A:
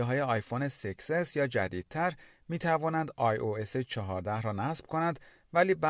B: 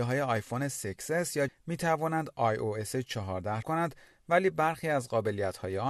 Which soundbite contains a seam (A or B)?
B